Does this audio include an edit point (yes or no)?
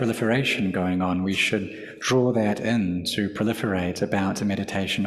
no